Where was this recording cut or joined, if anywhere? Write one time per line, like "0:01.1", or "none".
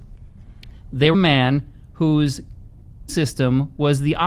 0:01.1
0:03.1